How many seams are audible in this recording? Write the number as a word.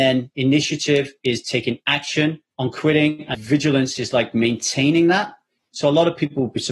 two